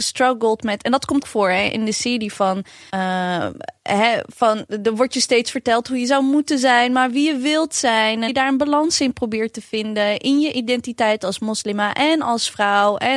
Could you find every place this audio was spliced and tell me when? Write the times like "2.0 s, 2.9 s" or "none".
1.2 s, 2.9 s, 8.3 s